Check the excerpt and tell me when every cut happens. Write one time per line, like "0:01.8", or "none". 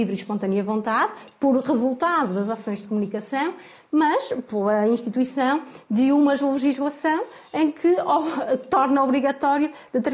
none